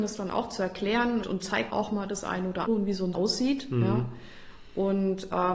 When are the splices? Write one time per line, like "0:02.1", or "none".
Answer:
0:01.2
0:01.7
0:02.7
0:03.1